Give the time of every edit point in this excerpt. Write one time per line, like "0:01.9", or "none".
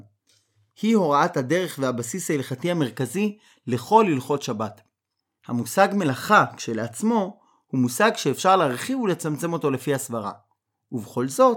none